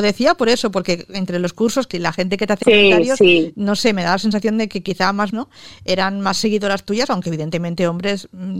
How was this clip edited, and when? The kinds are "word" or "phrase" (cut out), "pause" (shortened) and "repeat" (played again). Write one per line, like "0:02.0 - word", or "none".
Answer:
0:01.9 - word
0:02.6 - phrase
0:05.3 - word